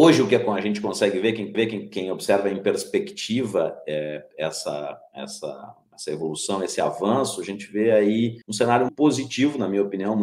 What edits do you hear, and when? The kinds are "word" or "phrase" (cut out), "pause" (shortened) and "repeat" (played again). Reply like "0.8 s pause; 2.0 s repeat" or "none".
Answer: 1.5 s repeat; 8.4 s pause; 8.9 s word